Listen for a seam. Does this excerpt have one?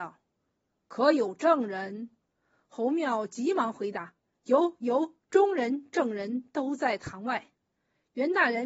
yes; 3 cuts; at 2.2 s, 5.2 s, 7.6 s

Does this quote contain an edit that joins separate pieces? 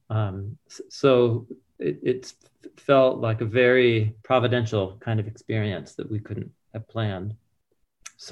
yes; 1 cut; at 4.2 s

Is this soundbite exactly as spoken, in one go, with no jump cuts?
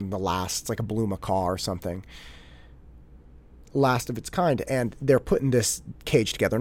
yes; 0 cuts

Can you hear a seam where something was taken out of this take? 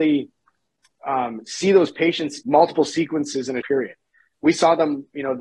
yes; 2 cuts; at 2.4 s, 3.6 s

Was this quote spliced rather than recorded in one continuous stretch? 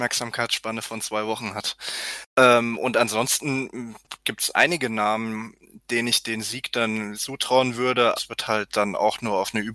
yes; 4 cuts; at 2.3 s, 4.5 s, 7.1 s, 8.2 s

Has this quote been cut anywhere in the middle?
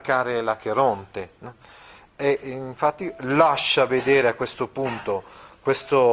no; 0 cuts

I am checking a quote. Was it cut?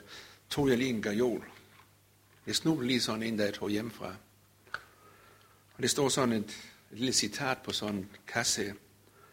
no; 0 cuts

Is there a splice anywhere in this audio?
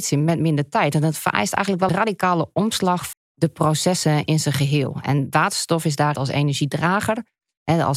yes; 3 cuts; at 1.9 s, 3.1 s, 6.1 s

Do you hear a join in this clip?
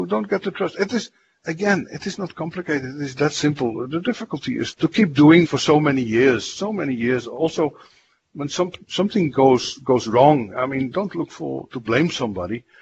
yes; 2 cuts; at 4.7 s, 5.4 s

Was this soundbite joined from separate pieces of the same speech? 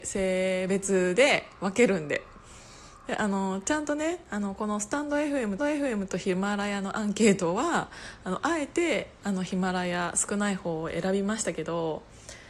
yes; 1 cut; at 5.6 s

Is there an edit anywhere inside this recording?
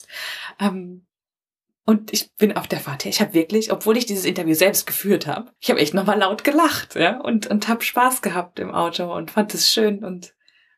yes; 1 cut; at 5.6 s

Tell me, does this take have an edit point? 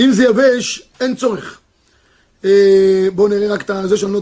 yes; 1 cut; at 0.9 s

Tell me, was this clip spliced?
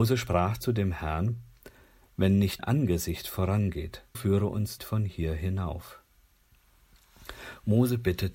yes; 3 cuts; at 2.6 s, 4.1 s, 4.8 s

